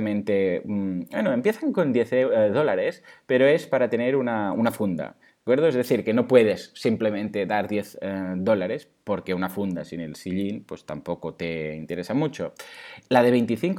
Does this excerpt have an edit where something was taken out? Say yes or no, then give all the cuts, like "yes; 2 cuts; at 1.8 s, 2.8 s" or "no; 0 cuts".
no; 0 cuts